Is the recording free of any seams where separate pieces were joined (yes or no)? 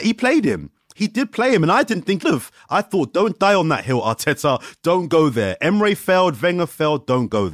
no